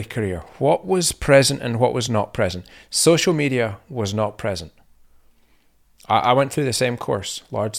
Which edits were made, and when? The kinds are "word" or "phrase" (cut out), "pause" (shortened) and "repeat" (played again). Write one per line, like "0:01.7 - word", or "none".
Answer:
none